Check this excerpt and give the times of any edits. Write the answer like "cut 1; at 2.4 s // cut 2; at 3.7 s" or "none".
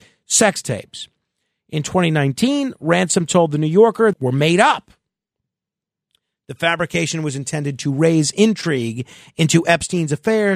cut 1; at 4.1 s